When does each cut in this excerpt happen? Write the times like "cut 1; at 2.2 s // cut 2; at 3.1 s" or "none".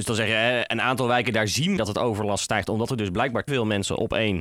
cut 1; at 1.8 s // cut 2; at 3.5 s